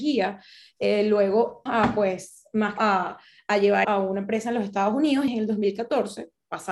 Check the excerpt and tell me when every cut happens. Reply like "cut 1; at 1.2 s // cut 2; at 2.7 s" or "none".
cut 1; at 1.7 s // cut 2; at 2.8 s // cut 3; at 3.8 s // cut 4; at 5.3 s